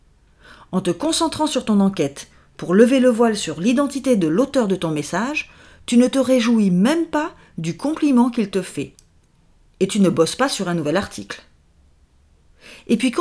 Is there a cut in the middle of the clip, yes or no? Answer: no